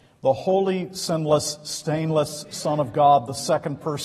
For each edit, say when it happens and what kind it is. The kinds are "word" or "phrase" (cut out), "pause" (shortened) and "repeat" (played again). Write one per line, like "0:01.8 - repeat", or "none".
none

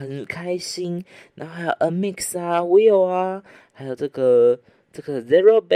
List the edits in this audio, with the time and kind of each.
none

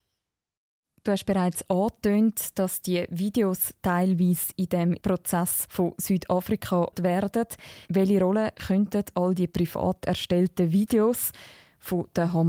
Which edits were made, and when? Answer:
0:07.0 - word
0:07.8 - pause

